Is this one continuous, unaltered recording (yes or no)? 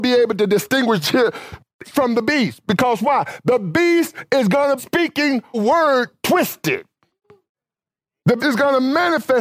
no